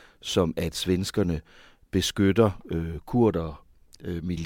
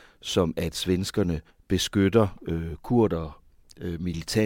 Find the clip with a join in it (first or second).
second